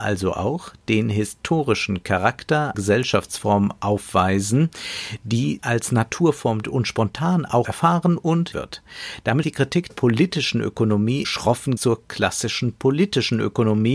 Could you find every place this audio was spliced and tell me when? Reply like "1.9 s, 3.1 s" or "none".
2.7 s, 5.6 s, 6.6 s, 7.6 s, 8.5 s, 9.4 s, 9.9 s, 11.2 s, 11.8 s